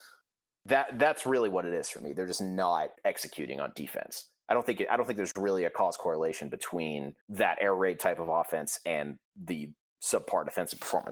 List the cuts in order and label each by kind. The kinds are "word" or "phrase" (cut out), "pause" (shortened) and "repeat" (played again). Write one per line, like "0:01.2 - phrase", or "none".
0:02.9 - pause
0:07.2 - pause
0:09.3 - pause